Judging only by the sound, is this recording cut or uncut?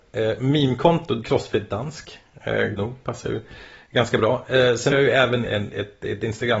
cut